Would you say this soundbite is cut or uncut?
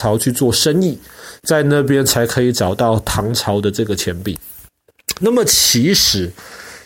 cut